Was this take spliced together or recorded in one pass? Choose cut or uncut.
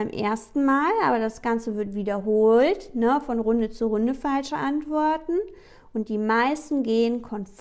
uncut